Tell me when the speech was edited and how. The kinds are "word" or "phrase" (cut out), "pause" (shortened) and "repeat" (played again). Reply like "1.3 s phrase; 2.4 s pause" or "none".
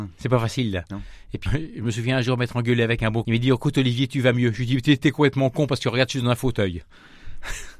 1.5 s word; 3.2 s word

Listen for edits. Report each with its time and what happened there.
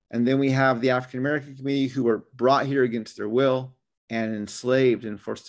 3.8 s pause

